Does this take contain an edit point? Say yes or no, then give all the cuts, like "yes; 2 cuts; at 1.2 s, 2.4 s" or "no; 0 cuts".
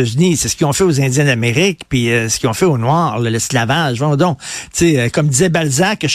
no; 0 cuts